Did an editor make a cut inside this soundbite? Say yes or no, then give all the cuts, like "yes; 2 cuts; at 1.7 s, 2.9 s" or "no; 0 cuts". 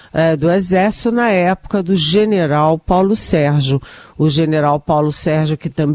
no; 0 cuts